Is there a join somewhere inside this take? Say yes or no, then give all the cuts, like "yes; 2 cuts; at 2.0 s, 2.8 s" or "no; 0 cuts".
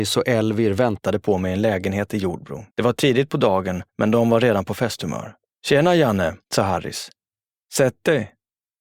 yes; 4 cuts; at 2.7 s, 3.9 s, 5.5 s, 6.4 s